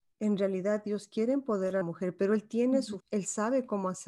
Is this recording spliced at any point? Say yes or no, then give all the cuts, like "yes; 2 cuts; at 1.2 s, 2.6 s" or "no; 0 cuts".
yes; 2 cuts; at 1.8 s, 3.0 s